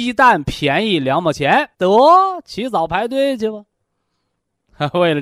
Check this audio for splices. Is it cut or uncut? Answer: cut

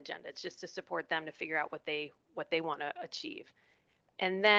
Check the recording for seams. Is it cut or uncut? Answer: uncut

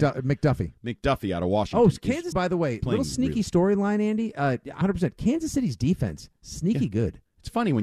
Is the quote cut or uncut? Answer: cut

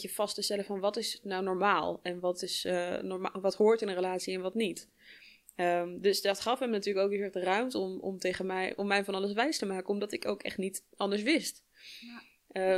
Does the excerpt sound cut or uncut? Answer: uncut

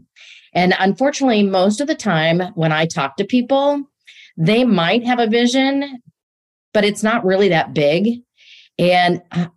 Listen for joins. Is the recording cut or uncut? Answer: uncut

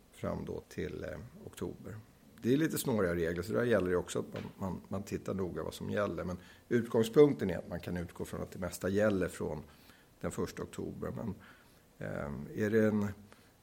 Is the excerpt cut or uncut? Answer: uncut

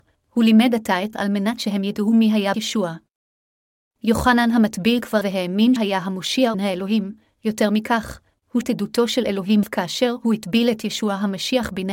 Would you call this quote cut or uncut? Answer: cut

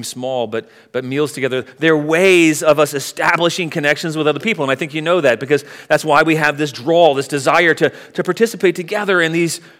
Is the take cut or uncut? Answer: uncut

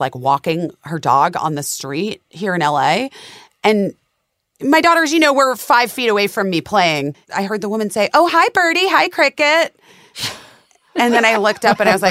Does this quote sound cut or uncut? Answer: cut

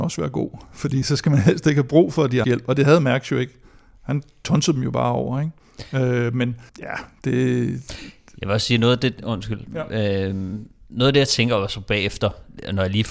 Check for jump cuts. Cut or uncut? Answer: cut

